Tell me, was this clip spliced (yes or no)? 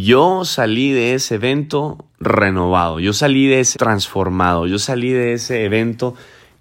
yes